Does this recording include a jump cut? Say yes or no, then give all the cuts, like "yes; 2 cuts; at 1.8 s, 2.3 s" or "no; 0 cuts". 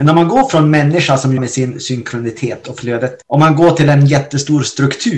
yes; 2 cuts; at 1.4 s, 3.2 s